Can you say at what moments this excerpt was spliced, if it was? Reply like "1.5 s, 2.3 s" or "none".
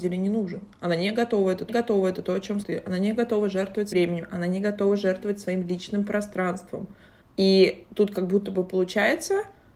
1.7 s, 2.6 s, 3.9 s, 7.2 s